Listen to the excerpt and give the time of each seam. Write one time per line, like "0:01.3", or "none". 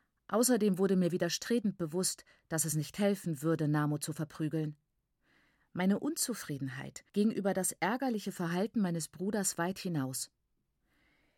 0:07.1